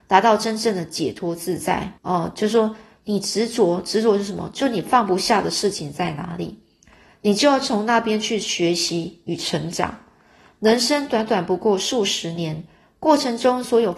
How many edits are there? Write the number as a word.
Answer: one